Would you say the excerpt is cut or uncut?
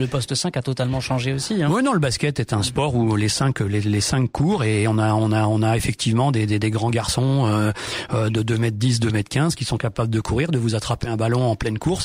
uncut